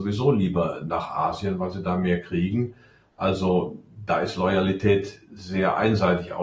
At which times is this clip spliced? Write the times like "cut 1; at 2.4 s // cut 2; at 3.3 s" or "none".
none